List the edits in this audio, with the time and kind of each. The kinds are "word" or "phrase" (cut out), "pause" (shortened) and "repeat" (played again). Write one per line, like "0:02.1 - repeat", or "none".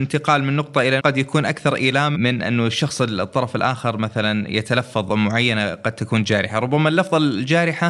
0:01.0 - word
0:02.1 - phrase
0:05.1 - word